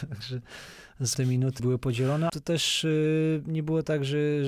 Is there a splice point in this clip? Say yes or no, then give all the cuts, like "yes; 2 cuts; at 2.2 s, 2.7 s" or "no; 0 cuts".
yes; 3 cuts; at 1.1 s, 1.6 s, 2.3 s